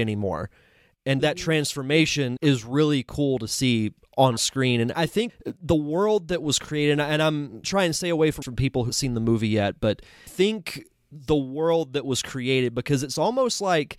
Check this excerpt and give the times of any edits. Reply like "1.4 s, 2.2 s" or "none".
1.2 s, 2.4 s, 4.9 s, 5.3 s, 7.6 s, 8.4 s, 8.9 s, 10.3 s

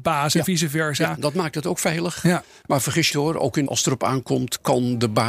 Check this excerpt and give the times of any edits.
3.1 s, 3.7 s

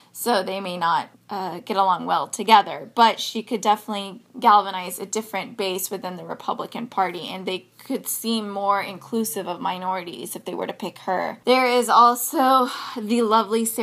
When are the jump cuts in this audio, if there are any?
1.1 s, 4.3 s

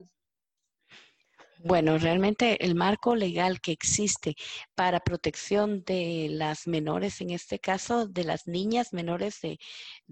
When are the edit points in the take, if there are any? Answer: none

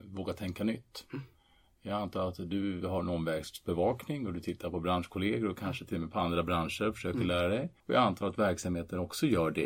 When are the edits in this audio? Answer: 7.8 s

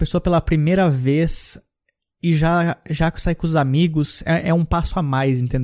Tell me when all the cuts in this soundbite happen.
none

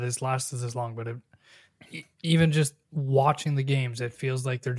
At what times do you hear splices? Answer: 2.1 s

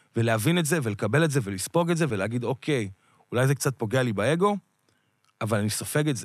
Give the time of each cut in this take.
none

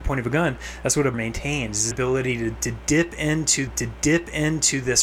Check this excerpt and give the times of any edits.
1.1 s, 1.9 s, 3.7 s

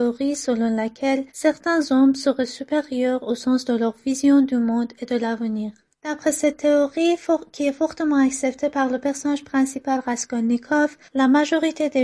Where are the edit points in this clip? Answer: 1.3 s, 5.9 s, 11.0 s

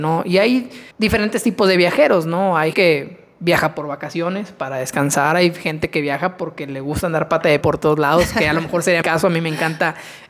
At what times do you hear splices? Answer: 0.9 s, 2.7 s, 7.6 s, 9.0 s

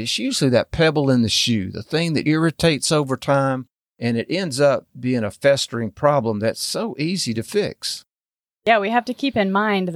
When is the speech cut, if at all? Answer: 2.2 s

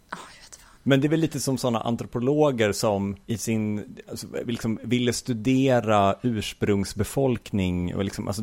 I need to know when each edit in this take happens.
3.2 s

